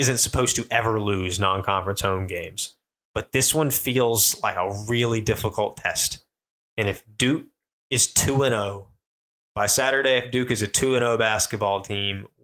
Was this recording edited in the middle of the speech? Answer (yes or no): no